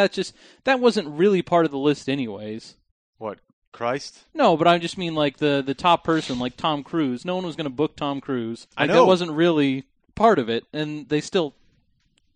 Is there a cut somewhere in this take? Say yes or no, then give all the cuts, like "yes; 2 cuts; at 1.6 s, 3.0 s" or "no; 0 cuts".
yes; 2 cuts; at 8.7 s, 10.0 s